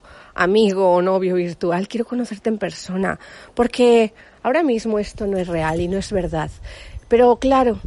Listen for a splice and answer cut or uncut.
uncut